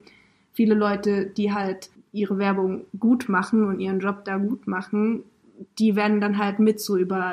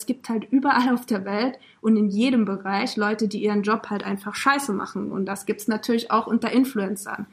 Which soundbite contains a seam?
first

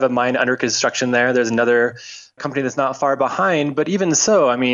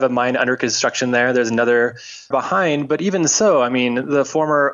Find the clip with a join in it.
second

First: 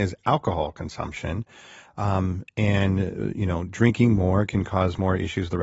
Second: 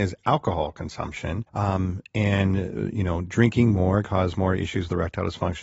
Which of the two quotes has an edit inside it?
second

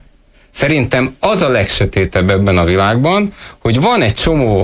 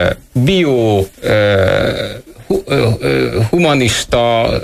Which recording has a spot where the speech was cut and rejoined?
second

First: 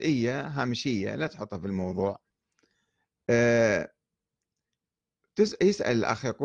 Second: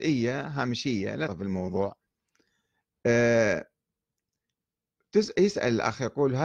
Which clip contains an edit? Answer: second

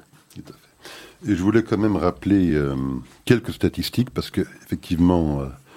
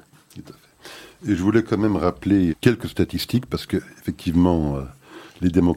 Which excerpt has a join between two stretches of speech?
second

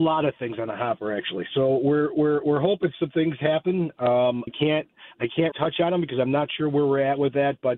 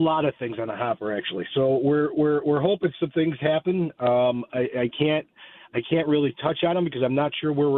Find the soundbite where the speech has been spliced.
first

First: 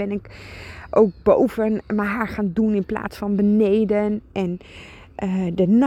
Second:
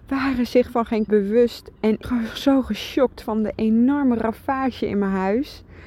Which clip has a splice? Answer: second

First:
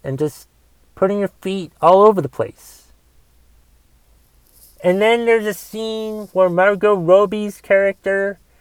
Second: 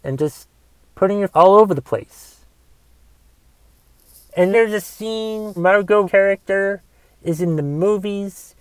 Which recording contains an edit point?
second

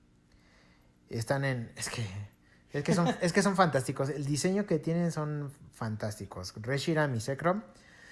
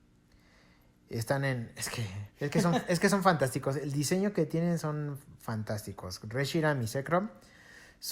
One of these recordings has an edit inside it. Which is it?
second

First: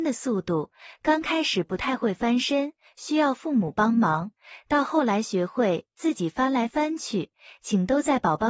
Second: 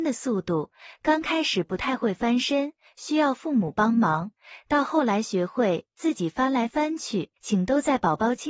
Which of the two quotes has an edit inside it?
second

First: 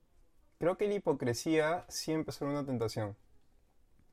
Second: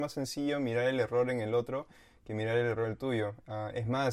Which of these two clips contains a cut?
first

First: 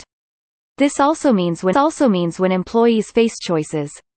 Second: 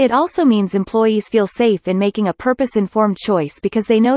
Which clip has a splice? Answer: first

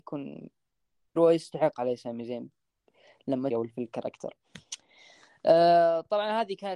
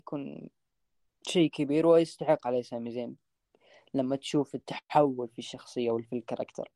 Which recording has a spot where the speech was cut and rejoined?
first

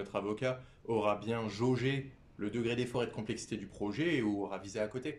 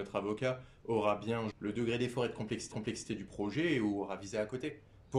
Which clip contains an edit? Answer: second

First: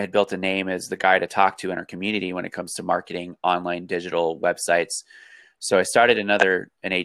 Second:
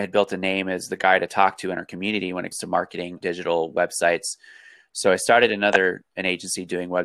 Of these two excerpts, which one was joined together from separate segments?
second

